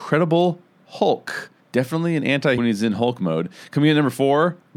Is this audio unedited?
no; 2 cuts; at 1.6 s, 2.6 s

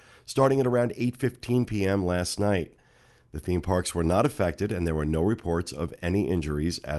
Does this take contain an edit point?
no; 0 cuts

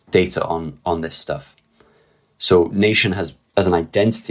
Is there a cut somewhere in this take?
no; 0 cuts

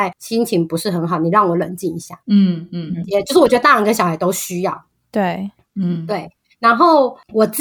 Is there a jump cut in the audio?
no; 0 cuts

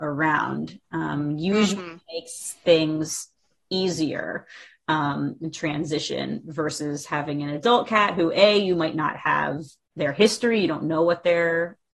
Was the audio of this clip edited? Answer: no; 0 cuts

